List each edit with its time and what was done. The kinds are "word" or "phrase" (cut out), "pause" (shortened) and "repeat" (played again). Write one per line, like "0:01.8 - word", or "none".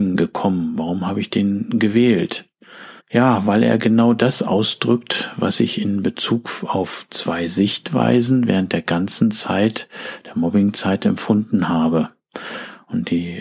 0:03.0 - pause